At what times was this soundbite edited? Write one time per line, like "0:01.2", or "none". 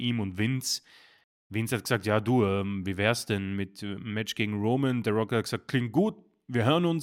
none